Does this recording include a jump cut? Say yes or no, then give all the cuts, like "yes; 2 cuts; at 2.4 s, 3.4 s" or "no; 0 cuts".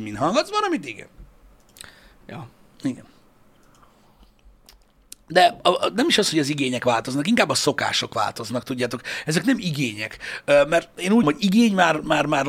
yes; 1 cut; at 11.2 s